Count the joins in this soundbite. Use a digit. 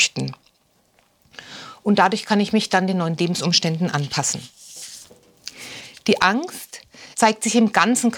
1